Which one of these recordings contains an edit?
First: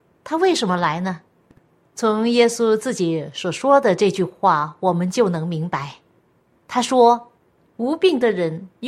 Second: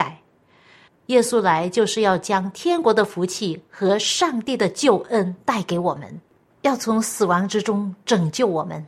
first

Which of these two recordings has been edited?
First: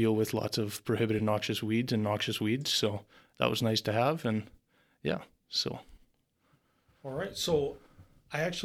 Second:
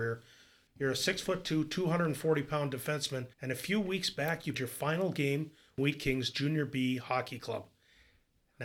second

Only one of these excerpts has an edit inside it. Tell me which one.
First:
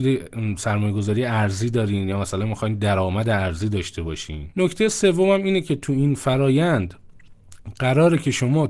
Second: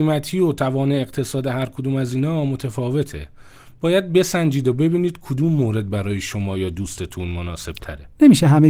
first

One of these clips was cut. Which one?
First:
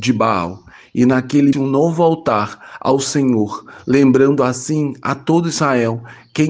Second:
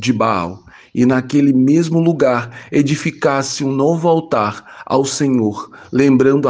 first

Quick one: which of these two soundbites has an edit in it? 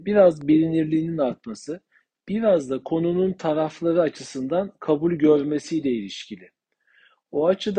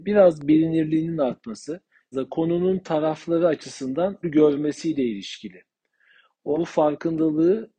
second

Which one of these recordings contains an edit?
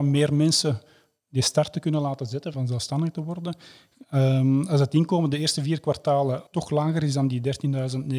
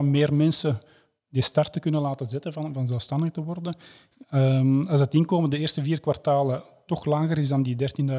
first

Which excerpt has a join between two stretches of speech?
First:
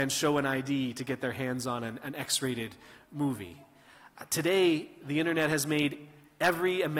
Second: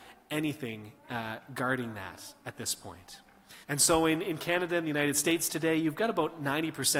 second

